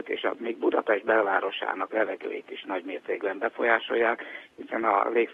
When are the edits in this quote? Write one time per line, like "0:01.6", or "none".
0:01.9